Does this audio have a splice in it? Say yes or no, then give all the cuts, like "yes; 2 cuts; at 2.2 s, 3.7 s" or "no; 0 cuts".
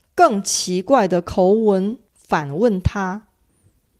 yes; 1 cut; at 2.1 s